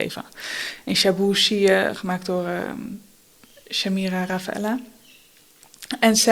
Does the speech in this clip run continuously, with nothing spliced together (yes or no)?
yes